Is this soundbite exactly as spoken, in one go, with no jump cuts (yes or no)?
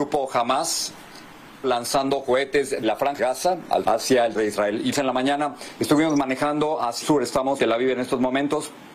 no